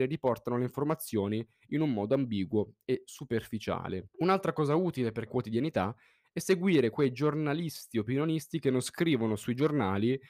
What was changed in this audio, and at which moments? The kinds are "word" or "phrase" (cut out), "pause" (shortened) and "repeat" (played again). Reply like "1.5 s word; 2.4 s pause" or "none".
4.1 s pause; 5.3 s phrase